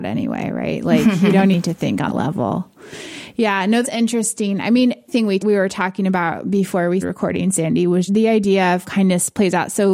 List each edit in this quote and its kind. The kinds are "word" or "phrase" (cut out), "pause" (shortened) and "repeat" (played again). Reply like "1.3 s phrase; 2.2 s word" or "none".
1.5 s word; 2.1 s word; 3.8 s word; 5.1 s word; 5.4 s word; 7.0 s word; 8.1 s word; 8.8 s word